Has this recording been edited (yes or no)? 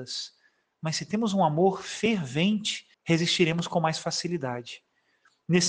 yes